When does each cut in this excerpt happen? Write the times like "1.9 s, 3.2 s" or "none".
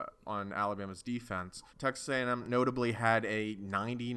1.7 s